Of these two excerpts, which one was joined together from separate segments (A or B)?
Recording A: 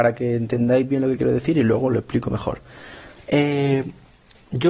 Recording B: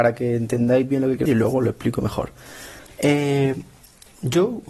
B